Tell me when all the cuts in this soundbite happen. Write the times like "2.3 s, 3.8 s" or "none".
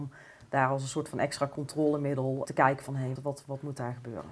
2.5 s, 3.2 s